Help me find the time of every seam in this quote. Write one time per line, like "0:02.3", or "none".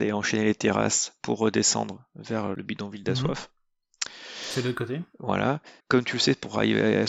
0:05.8